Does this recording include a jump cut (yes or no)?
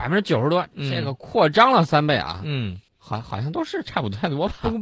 yes